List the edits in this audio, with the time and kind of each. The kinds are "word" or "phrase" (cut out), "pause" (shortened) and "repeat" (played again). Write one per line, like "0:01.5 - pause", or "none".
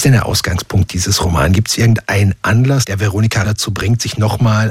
0:03.4 - word